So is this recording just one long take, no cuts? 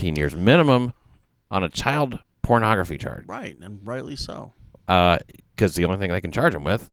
yes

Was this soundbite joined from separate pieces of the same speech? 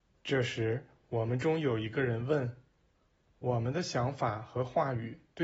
no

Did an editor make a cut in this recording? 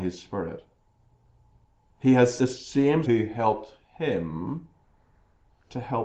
yes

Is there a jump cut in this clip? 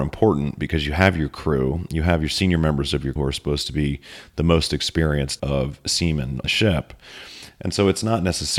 yes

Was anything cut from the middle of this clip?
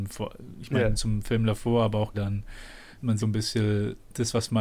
yes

